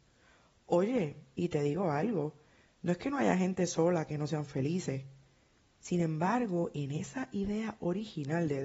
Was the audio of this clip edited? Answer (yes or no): no